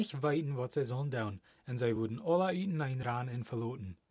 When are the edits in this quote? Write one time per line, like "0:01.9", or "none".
none